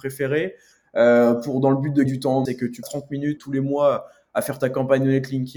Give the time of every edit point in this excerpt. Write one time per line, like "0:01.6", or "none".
0:02.1
0:02.5
0:02.8
0:03.4